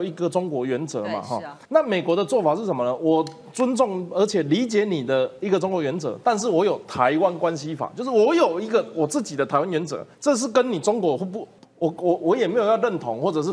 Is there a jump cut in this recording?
yes; 3 cuts; at 1.6 s, 10.1 s, 11.6 s

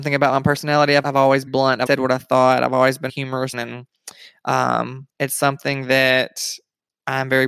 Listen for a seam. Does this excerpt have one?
yes; 6 cuts; at 1.0 s, 1.5 s, 1.9 s, 3.1 s, 3.5 s, 5.1 s

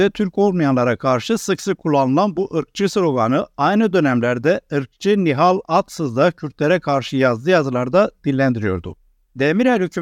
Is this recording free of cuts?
yes; 0 cuts

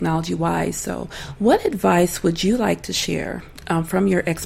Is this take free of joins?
yes; 0 cuts

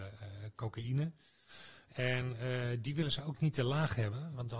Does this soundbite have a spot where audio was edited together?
no; 0 cuts

